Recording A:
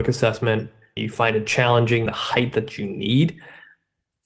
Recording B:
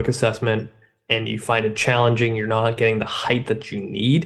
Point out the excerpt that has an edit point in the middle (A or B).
A